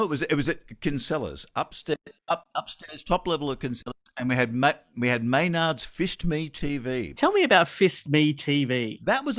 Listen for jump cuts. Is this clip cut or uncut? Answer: cut